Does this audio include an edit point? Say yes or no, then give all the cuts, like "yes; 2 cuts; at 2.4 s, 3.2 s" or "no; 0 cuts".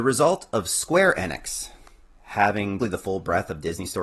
yes; 1 cut; at 2.8 s